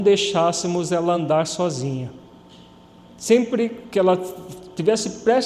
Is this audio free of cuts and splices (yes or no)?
yes